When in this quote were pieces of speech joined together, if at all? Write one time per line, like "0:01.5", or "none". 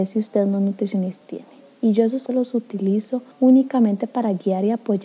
0:01.2
0:02.3
0:03.3

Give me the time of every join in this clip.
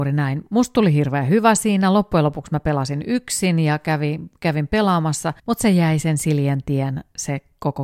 0:05.4

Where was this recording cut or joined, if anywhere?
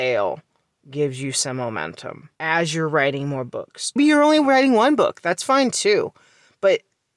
0:02.3
0:04.0

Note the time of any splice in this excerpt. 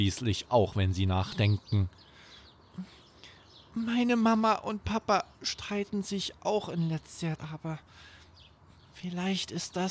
0:07.4

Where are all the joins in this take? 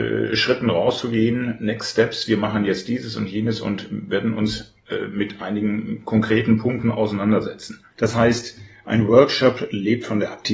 0:07.9

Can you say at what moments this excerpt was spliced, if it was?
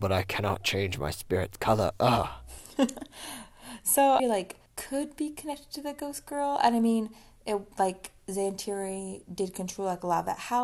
0:04.2
0:04.7
0:07.7

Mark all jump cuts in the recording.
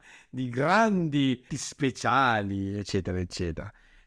0:01.5

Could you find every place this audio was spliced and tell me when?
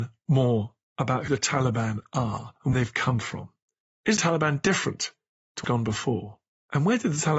0:01.3
0:02.7
0:04.2
0:05.6

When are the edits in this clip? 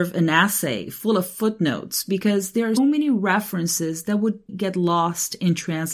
0:02.8
0:04.5

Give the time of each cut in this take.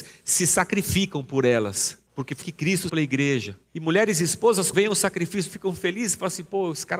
0:02.1
0:02.4
0:02.9
0:03.7
0:04.7
0:05.5

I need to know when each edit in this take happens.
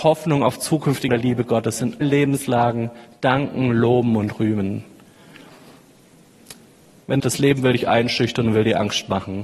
0:01.1
0:02.0
0:07.2

